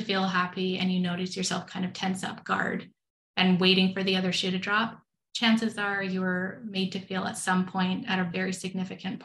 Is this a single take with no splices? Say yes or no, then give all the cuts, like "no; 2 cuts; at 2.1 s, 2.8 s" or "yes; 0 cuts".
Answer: yes; 0 cuts